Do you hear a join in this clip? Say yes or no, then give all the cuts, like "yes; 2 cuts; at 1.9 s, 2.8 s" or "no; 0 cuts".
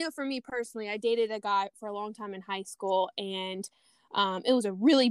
no; 0 cuts